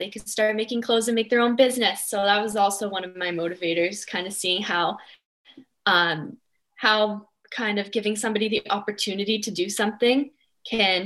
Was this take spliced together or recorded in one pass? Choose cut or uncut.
uncut